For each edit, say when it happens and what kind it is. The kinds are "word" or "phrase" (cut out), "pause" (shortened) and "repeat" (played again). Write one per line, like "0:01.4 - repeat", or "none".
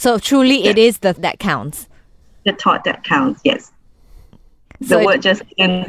0:01.2 - word